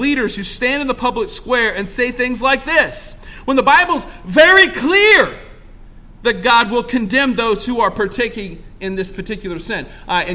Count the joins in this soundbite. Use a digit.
0